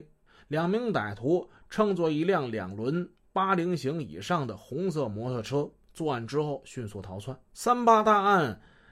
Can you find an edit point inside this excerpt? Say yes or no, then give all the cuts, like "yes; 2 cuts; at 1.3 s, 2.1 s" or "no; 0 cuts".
yes; 1 cut; at 7.4 s